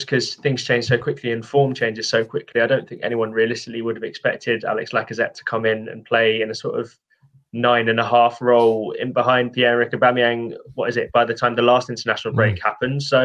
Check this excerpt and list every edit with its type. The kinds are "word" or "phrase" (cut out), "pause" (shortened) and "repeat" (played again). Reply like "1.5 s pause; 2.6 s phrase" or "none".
none